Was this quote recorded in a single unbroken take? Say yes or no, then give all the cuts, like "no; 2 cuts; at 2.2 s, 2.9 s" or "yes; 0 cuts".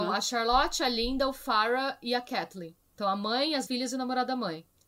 no; 1 cut; at 3.7 s